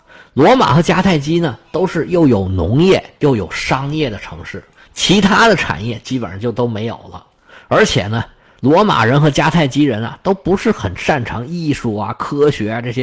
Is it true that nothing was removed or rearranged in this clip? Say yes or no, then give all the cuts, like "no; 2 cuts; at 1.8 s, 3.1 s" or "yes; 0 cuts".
no; 1 cut; at 3.2 s